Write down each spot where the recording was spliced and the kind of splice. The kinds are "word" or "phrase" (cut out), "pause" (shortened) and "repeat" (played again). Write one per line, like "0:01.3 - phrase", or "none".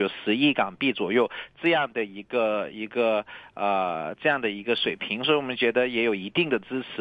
none